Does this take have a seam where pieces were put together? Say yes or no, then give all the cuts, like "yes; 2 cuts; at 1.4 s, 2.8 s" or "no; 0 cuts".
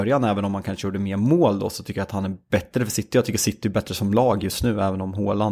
no; 0 cuts